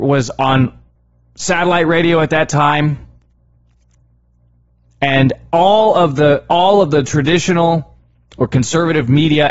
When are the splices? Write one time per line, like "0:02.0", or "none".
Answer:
0:00.9